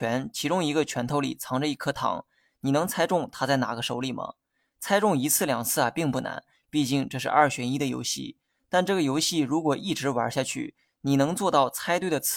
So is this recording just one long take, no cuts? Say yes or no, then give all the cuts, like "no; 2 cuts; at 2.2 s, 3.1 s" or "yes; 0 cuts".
yes; 0 cuts